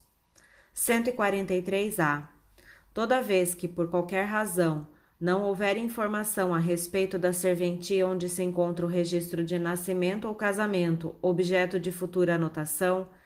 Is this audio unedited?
yes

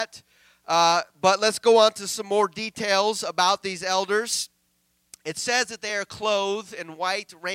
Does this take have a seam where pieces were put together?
no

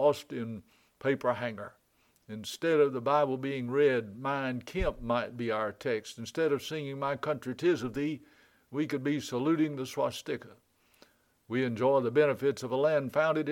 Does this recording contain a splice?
no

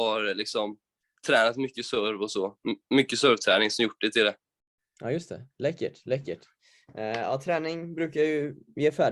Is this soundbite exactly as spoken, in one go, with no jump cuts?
yes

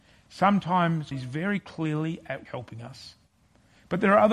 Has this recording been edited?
yes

